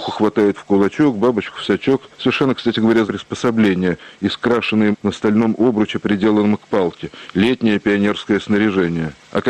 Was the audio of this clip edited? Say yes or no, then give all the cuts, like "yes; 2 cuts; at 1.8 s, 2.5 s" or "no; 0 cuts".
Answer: yes; 2 cuts; at 3.0 s, 4.9 s